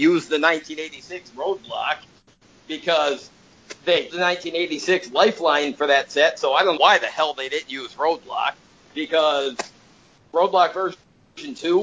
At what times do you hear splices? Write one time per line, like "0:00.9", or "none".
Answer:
0:04.1
0:06.7